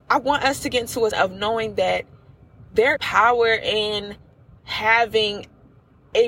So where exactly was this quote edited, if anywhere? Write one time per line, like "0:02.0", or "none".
0:01.1
0:03.0